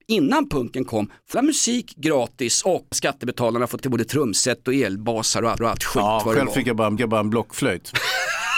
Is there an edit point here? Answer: yes; 5 cuts; at 1.3 s, 2.9 s, 3.8 s, 5.6 s, 7.0 s

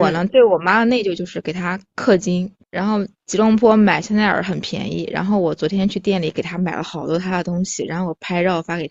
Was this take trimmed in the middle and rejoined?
yes; 2 cuts; at 2.6 s, 3.1 s

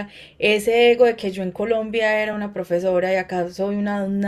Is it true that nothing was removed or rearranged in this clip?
yes; 0 cuts

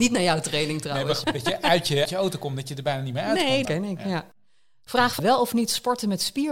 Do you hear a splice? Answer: yes; 4 cuts; at 1.2 s, 2.0 s, 3.6 s, 5.2 s

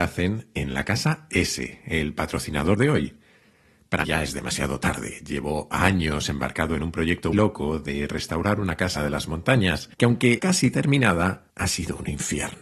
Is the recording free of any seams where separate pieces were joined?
no; 7 cuts; at 2.8 s, 4.0 s, 7.3 s, 9.0 s, 9.9 s, 10.4 s, 11.5 s

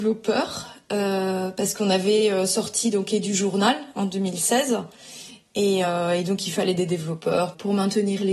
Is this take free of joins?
yes; 0 cuts

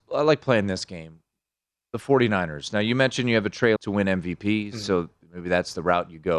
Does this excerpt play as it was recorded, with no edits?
no; 1 cut; at 3.8 s

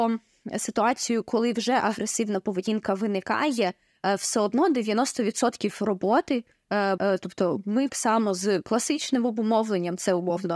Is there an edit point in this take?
yes; 2 cuts; at 7.0 s, 7.9 s

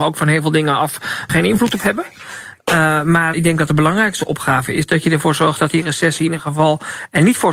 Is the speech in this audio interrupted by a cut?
yes; 2 cuts; at 1.3 s, 3.3 s

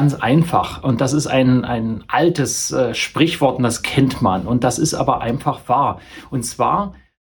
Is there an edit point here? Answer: no; 0 cuts

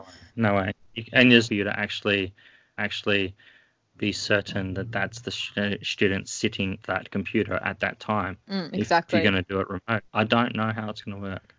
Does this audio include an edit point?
yes; 5 cuts; at 1.5 s, 2.8 s, 6.8 s, 8.4 s, 10.1 s

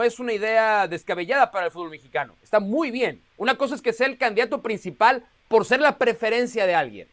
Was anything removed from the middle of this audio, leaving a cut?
yes; 1 cut; at 3.3 s

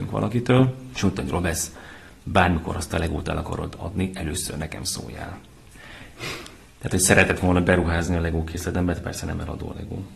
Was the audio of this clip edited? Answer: no; 0 cuts

